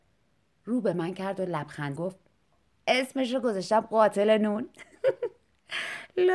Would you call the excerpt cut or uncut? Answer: cut